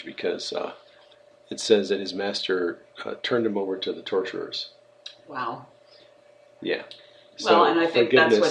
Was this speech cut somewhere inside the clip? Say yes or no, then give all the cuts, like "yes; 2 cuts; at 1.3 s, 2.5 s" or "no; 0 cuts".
no; 0 cuts